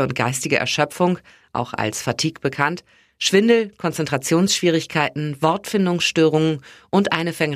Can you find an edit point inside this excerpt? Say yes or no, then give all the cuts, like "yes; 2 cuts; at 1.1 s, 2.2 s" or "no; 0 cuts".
no; 0 cuts